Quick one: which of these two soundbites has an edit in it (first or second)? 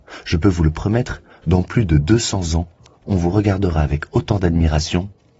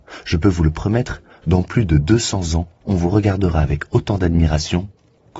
second